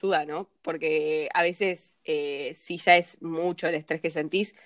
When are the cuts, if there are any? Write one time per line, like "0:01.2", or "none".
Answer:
0:02.0